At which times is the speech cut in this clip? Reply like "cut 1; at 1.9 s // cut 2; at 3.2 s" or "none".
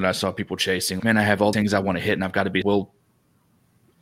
cut 1; at 1.0 s // cut 2; at 1.5 s // cut 3; at 2.6 s